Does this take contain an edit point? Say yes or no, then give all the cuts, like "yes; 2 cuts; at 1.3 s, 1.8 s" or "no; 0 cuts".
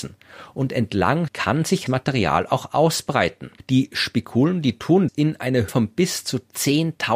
yes; 4 cuts; at 1.3 s, 1.9 s, 5.1 s, 5.7 s